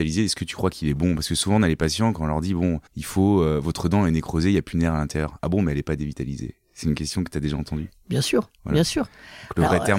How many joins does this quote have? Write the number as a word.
one